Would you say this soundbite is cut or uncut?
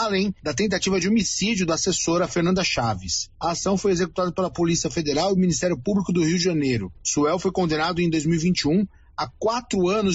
uncut